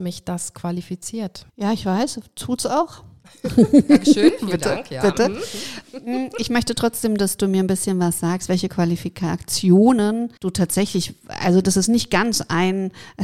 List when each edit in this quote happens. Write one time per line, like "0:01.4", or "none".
0:01.5
0:10.4